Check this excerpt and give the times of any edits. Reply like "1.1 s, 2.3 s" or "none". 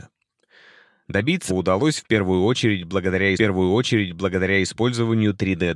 1.5 s, 3.3 s